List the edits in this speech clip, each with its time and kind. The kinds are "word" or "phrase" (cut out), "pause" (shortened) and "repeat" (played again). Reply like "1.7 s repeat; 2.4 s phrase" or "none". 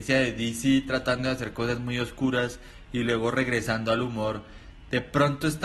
none